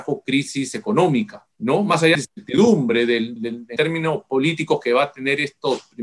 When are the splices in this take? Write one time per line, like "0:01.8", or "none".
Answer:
0:01.5
0:02.1
0:03.4
0:03.8